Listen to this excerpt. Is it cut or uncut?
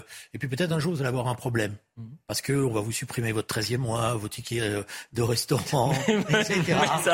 uncut